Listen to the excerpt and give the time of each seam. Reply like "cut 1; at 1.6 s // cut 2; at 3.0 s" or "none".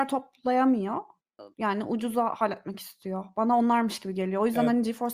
cut 1; at 1.5 s